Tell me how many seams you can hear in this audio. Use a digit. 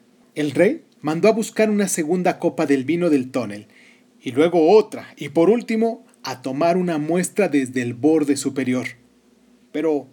0